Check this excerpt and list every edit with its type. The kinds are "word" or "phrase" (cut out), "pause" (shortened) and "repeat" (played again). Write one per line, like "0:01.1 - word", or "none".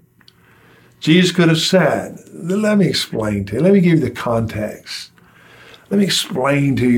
none